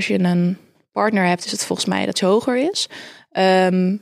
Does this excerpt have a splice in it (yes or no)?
yes